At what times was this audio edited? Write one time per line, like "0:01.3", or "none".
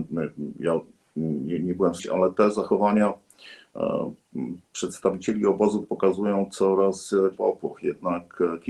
0:02.0
0:04.6
0:05.8
0:07.3

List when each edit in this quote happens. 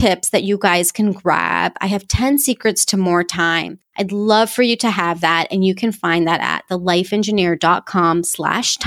none

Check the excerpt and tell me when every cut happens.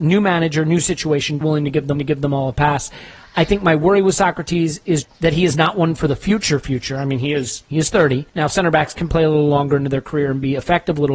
0:01.4
0:01.9
0:05.0
0:08.3

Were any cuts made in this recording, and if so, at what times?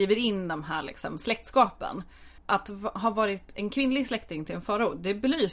0:02.4

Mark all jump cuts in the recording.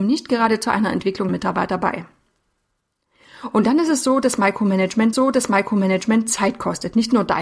0:01.3
0:05.1

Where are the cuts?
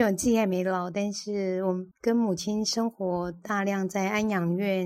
0:01.9

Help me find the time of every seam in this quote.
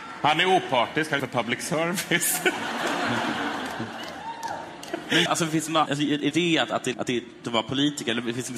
0:01.2
0:05.3
0:05.9
0:06.3
0:06.9
0:07.4

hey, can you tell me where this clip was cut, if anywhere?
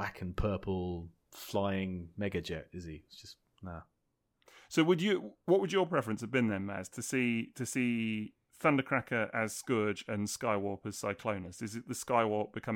none

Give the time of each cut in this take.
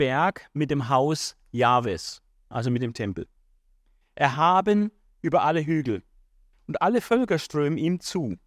none

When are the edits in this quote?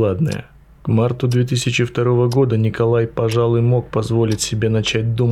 none

